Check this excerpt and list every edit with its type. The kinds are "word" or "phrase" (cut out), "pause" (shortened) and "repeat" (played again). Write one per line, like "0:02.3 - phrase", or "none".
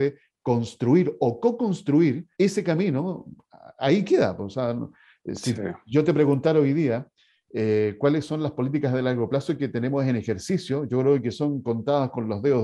0:02.3 - pause

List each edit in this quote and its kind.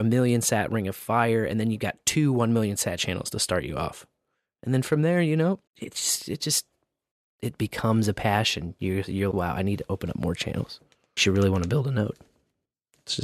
0:05.7 - pause
0:09.3 - word
0:11.2 - word

